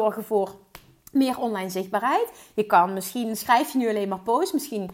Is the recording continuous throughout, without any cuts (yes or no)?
yes